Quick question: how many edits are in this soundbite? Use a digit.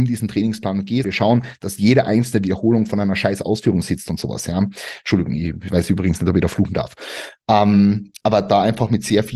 1